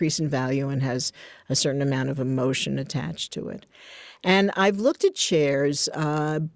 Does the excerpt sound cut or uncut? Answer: uncut